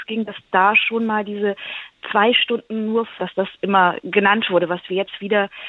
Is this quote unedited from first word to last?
no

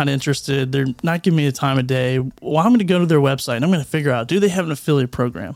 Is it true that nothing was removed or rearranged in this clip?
yes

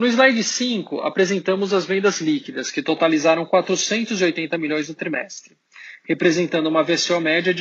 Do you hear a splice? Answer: no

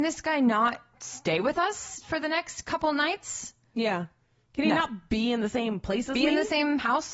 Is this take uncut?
yes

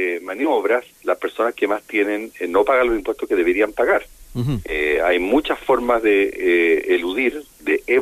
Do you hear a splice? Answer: yes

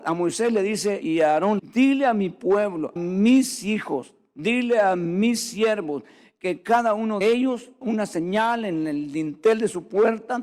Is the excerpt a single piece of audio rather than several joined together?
no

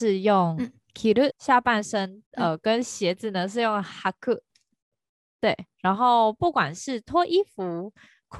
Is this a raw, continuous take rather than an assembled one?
no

